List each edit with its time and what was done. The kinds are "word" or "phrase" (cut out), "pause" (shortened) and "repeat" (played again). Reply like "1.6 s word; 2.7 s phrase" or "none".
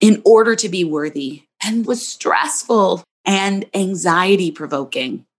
1.8 s word

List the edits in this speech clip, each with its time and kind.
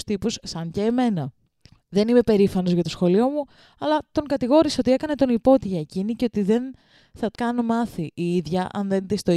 7.3 s word

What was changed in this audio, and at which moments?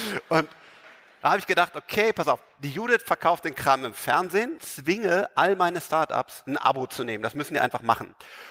4.6 s phrase

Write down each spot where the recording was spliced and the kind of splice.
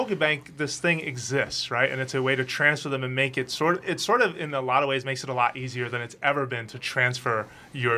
3.8 s word

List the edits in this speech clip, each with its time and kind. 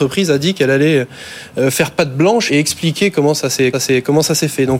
2.5 s word; 3.7 s repeat

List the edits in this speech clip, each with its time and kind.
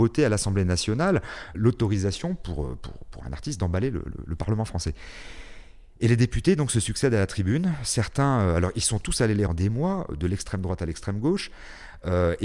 9.5 s phrase

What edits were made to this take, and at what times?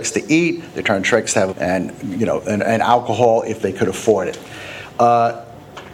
1.5 s phrase

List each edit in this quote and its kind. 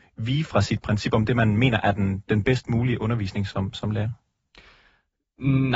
none

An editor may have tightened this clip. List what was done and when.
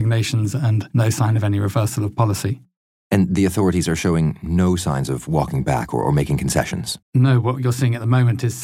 7.0 s pause

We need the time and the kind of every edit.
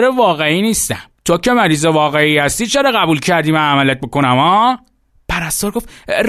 1.1 s pause; 5.1 s pause

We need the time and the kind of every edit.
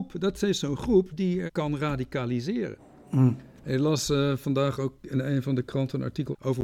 none

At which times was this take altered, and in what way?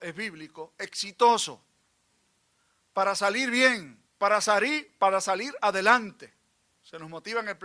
4.1 s pause

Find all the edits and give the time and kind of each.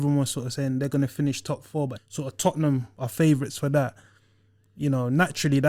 2.0 s word

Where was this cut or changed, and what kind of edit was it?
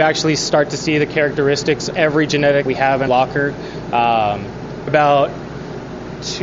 1.9 s word; 2.7 s word; 3.1 s word; 4.9 s word

